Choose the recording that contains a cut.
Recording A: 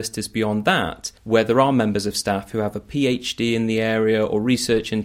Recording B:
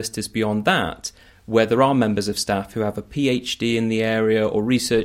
A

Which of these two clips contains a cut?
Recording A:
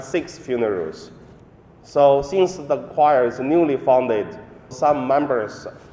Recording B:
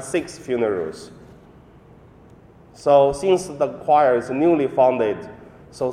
A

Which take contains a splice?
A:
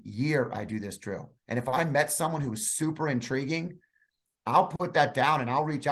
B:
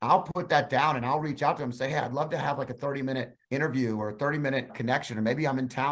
B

